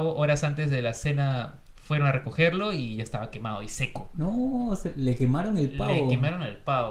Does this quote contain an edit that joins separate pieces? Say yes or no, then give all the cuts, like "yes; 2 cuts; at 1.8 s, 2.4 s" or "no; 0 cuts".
no; 0 cuts